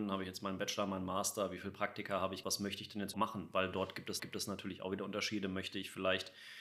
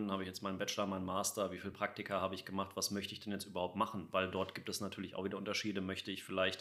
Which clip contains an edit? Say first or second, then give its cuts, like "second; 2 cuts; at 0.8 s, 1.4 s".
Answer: first; 3 cuts; at 2.4 s, 3.1 s, 4.2 s